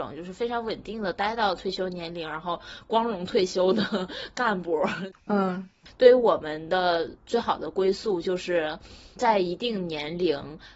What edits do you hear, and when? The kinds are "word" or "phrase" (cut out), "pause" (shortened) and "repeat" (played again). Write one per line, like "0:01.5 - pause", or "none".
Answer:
0:09.2 - word